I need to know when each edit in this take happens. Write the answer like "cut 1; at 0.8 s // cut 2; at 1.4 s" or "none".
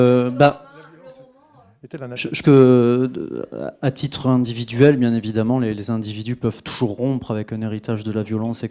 cut 1; at 2.4 s